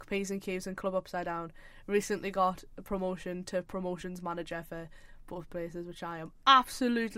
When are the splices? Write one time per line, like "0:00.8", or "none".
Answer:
none